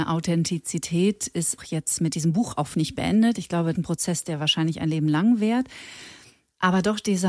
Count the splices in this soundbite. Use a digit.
3